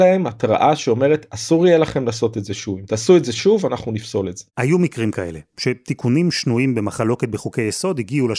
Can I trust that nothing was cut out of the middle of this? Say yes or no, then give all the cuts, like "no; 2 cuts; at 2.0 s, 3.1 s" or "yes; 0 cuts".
no; 1 cut; at 4.5 s